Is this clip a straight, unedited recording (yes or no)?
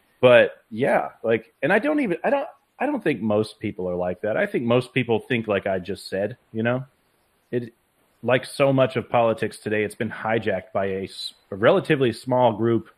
yes